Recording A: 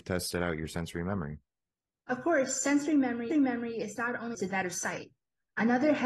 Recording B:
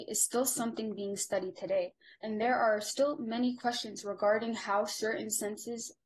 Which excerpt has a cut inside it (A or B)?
A